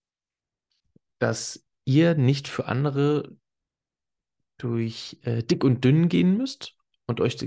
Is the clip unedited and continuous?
yes; 0 cuts

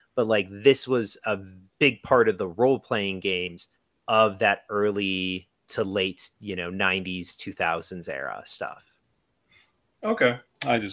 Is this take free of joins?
no; 2 cuts; at 3.8 s, 6.3 s

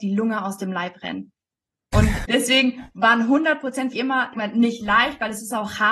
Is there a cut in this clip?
yes; 3 cuts; at 2.2 s, 3.9 s, 4.3 s

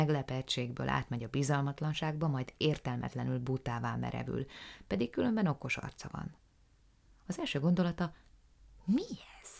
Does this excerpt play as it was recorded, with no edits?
yes; 0 cuts

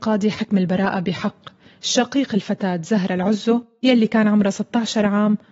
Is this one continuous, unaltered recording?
yes; 0 cuts

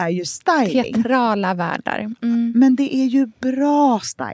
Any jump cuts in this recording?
no; 0 cuts

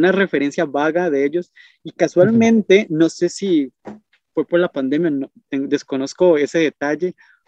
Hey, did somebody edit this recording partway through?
no; 0 cuts

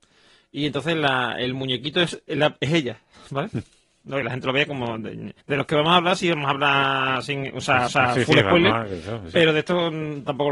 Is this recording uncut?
no; 3 cuts; at 4.2 s, 5.4 s, 7.9 s

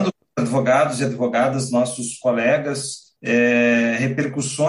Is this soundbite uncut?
no; 1 cut; at 3.2 s

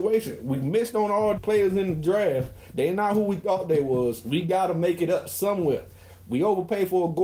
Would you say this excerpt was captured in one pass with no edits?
no; 1 cut; at 1.4 s

